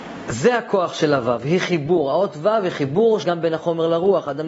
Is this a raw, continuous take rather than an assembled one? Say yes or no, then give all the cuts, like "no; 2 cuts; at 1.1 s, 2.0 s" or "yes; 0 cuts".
no; 1 cut; at 3.2 s